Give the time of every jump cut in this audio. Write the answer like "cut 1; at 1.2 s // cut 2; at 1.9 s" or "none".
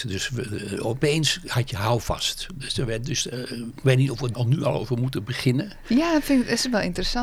cut 1; at 4.3 s